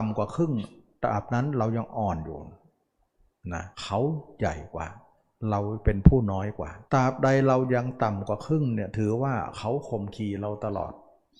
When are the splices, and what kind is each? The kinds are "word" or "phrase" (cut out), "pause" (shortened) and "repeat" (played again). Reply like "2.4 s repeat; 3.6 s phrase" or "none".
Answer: 3.7 s pause; 6.9 s pause